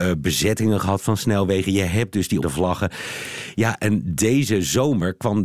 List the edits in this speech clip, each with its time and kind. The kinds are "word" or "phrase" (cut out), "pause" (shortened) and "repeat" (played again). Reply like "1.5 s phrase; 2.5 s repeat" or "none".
2.4 s word